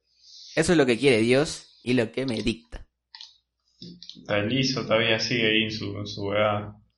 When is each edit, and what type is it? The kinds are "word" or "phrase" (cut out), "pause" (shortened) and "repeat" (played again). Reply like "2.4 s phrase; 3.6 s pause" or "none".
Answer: none